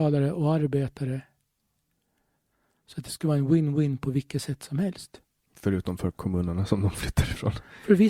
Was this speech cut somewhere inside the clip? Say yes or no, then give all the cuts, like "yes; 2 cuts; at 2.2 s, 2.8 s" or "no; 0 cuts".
no; 0 cuts